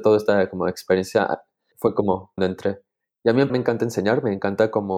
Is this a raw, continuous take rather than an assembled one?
no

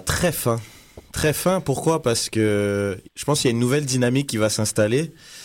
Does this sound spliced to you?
yes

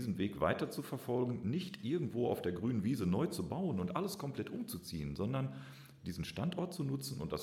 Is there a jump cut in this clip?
no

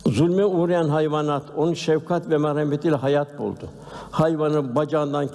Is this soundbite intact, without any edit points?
yes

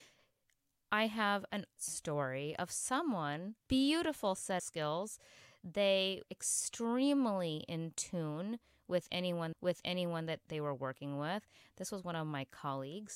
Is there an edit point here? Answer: yes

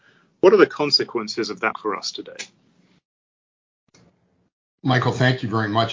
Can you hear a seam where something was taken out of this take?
yes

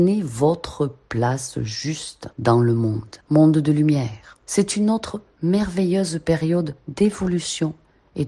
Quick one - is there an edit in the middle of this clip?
yes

